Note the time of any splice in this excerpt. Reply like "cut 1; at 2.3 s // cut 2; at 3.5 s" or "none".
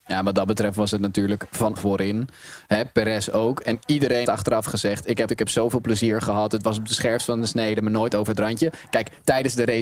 cut 1; at 1.8 s // cut 2; at 4.3 s // cut 3; at 5.3 s